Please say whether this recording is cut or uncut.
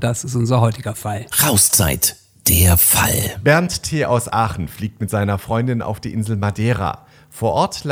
uncut